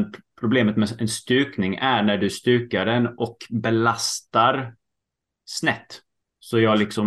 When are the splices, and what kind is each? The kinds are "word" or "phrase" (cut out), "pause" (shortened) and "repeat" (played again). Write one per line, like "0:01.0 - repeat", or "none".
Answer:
none